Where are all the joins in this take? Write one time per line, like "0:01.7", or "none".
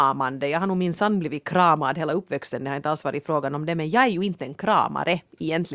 none